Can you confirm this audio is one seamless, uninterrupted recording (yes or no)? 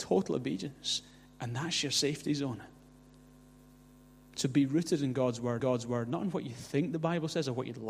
no